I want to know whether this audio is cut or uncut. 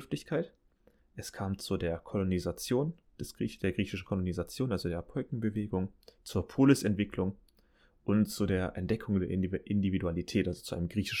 uncut